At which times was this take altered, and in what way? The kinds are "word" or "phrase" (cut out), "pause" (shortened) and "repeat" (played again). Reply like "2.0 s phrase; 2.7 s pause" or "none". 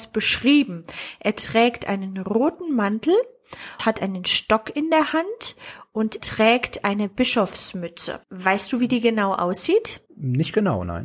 3.8 s word; 6.2 s word; 8.2 s pause; 10.1 s pause